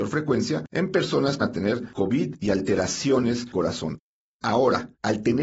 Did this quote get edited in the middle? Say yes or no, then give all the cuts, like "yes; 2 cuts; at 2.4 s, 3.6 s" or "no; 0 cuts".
yes; 2 cuts; at 1.4 s, 3.5 s